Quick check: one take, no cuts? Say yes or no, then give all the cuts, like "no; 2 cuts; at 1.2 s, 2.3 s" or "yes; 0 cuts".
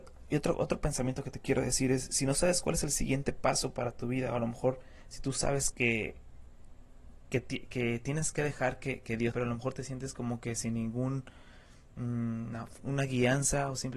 no; 3 cuts; at 5.7 s, 9.3 s, 12.8 s